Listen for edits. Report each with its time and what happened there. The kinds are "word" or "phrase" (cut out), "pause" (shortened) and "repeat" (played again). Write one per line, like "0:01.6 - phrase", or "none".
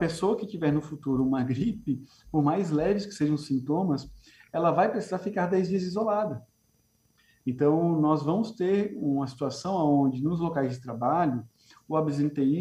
none